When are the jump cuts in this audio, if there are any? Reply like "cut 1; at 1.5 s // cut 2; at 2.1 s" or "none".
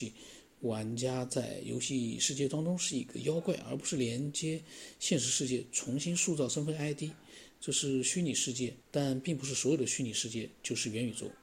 cut 1; at 8.8 s

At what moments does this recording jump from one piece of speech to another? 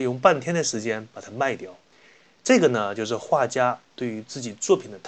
cut 1; at 1.8 s

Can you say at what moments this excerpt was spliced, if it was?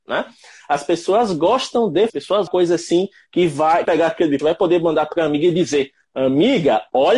cut 1; at 2.1 s // cut 2; at 2.5 s // cut 3; at 3.8 s // cut 4; at 4.4 s

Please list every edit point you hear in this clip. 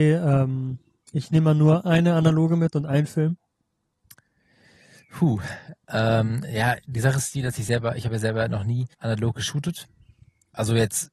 cut 1; at 8.9 s

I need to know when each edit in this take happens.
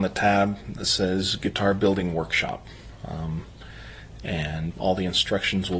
cut 1; at 4.7 s

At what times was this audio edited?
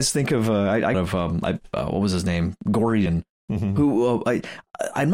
cut 1; at 0.9 s // cut 2; at 3.1 s

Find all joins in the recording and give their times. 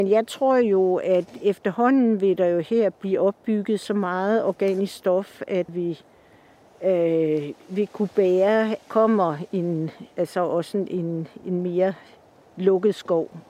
cut 1; at 5.7 s // cut 2; at 8.8 s

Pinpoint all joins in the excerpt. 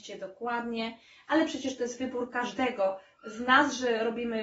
none

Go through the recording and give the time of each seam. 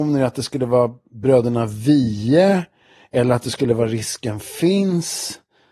none

